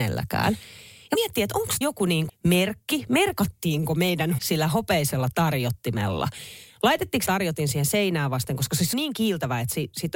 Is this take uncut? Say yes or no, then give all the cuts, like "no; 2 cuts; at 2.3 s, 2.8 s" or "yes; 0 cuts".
no; 6 cuts; at 1.1 s, 1.8 s, 2.3 s, 4.4 s, 7.3 s, 8.9 s